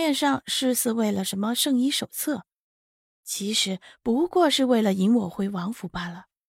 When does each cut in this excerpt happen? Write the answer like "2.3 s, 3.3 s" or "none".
none